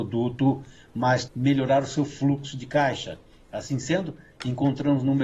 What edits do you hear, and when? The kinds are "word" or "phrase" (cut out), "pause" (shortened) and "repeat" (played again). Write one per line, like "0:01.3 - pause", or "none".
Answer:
0:01.3 - word